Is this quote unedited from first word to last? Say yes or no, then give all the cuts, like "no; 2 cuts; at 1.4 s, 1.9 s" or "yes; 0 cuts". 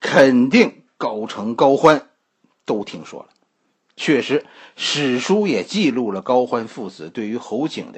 yes; 0 cuts